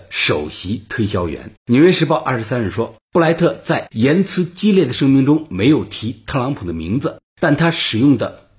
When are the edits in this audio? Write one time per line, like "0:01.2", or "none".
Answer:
0:01.6